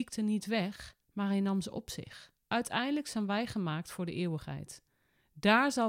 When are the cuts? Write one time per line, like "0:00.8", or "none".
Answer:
0:01.0
0:02.4